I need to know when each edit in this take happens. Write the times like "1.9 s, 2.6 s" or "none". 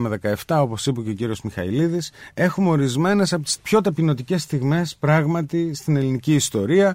none